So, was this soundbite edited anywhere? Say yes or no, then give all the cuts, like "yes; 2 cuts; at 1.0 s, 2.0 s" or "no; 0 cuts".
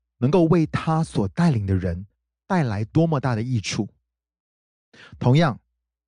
no; 0 cuts